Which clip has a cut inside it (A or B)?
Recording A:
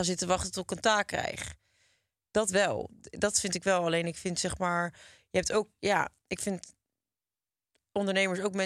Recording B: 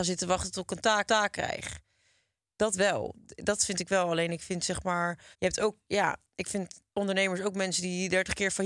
B